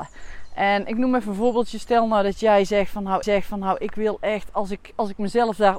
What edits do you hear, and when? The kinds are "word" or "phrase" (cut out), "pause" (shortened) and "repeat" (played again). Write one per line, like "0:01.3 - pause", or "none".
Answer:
0:03.2 - repeat